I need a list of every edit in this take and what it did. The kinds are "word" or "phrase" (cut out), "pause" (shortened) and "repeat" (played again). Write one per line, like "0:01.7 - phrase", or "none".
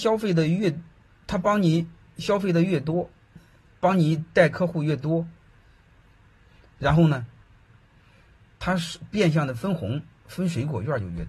none